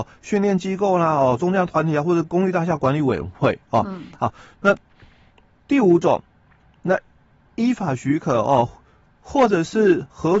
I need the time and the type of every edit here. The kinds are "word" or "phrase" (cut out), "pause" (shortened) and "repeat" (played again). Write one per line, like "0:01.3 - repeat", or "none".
none